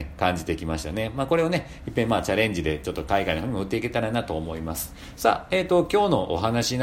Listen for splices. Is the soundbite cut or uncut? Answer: uncut